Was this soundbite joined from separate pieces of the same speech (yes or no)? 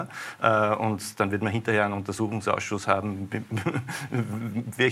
no